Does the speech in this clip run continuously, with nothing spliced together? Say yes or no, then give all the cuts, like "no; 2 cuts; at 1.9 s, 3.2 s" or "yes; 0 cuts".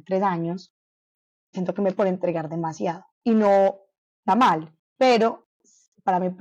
no; 5 cuts; at 1.5 s, 1.9 s, 3.1 s, 4.3 s, 4.8 s